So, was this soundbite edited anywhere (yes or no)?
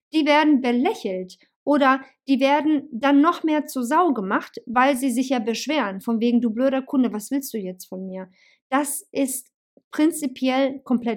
no